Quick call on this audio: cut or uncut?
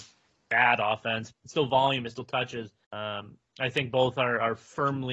cut